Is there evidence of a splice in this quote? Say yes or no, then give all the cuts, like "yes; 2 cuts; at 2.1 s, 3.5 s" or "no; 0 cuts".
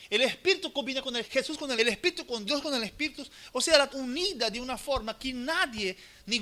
yes; 4 cuts; at 1.3 s, 1.8 s, 2.5 s, 3.9 s